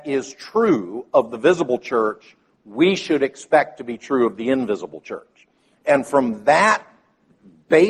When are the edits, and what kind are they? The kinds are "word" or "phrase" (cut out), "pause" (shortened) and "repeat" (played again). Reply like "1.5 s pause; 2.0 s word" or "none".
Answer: none